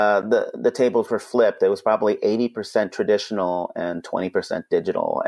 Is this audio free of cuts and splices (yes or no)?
yes